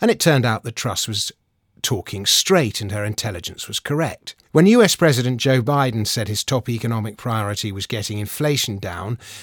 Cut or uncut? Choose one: cut